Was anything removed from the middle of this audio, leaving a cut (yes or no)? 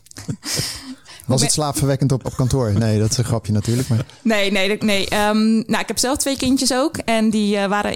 yes